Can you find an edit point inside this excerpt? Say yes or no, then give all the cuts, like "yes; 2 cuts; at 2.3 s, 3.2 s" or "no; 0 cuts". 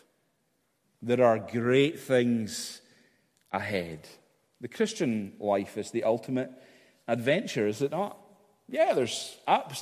no; 0 cuts